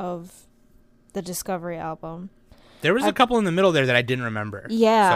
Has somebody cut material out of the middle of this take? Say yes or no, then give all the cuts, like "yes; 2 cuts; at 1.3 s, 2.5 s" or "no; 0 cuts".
no; 0 cuts